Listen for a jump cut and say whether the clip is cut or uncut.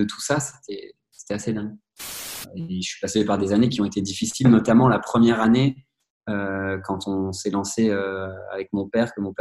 uncut